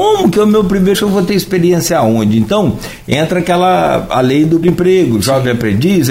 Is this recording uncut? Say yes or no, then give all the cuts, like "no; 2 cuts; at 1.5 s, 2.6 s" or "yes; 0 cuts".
no; 2 cuts; at 0.9 s, 4.6 s